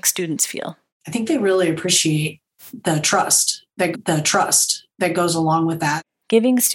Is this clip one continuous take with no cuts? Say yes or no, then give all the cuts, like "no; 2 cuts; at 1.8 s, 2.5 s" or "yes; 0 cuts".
no; 1 cut; at 3.9 s